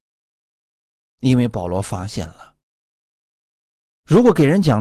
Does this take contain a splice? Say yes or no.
no